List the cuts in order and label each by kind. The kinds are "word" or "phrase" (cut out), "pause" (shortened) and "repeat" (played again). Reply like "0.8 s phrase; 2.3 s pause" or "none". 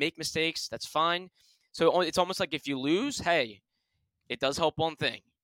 none